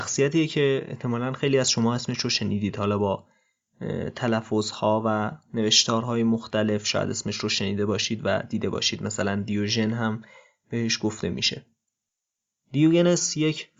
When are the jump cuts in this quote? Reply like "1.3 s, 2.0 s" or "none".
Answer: none